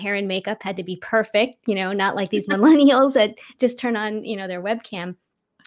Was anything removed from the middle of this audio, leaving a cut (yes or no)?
no